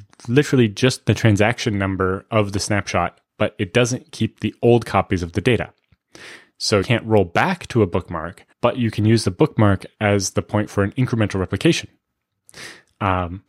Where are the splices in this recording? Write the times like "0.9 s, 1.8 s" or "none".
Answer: 6.8 s, 8.5 s